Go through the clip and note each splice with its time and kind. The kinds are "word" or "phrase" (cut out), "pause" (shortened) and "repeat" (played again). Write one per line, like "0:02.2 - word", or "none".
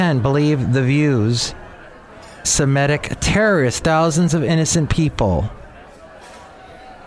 0:02.4 - phrase
0:03.8 - phrase